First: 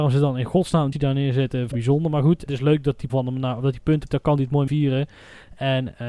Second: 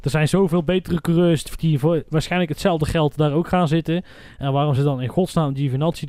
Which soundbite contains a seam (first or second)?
first